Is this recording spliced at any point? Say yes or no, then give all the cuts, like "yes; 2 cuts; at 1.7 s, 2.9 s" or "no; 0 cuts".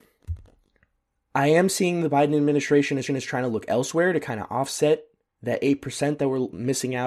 yes; 1 cut; at 3.1 s